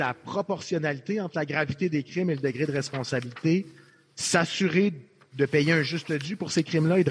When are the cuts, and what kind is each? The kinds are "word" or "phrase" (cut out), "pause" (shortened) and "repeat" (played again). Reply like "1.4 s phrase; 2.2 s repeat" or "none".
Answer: none